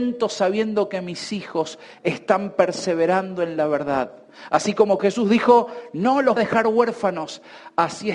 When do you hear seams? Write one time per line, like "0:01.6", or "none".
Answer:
0:05.0
0:06.4